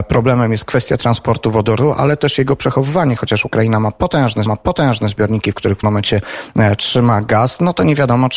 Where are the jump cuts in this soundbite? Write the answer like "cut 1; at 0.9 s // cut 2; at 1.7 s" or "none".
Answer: cut 1; at 4.5 s // cut 2; at 5.8 s